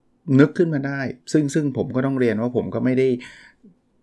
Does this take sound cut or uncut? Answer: cut